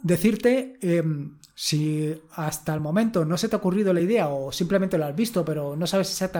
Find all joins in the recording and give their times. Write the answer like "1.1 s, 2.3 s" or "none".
none